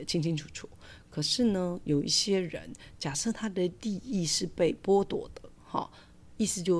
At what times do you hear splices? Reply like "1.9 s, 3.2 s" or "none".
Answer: 5.5 s